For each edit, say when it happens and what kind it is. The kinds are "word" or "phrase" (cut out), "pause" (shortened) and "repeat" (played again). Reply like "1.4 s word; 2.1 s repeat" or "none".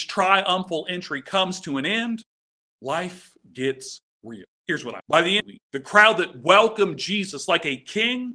4.5 s pause; 5.0 s word; 5.4 s phrase